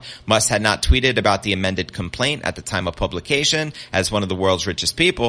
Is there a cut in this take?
no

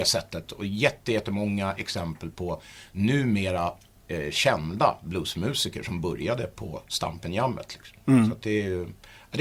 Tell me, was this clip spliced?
no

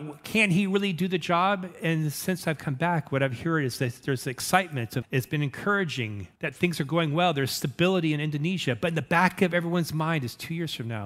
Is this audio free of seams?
no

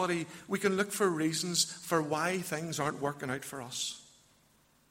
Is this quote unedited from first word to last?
yes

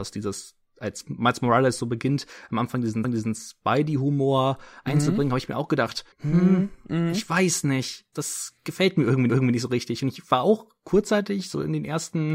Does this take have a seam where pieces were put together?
yes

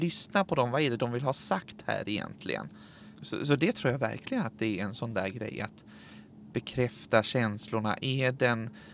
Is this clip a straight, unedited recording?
yes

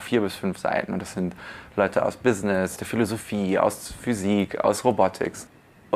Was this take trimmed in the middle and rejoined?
yes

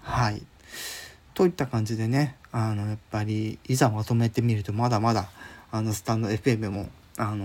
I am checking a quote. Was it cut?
no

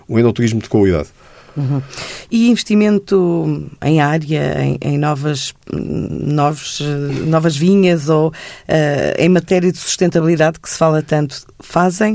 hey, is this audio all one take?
yes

